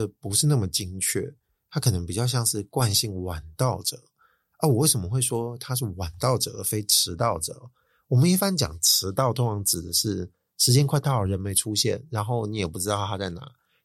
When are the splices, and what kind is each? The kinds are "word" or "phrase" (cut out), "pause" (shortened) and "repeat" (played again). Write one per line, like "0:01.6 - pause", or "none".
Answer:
none